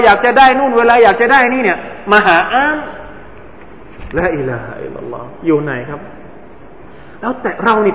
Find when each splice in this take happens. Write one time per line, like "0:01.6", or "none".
none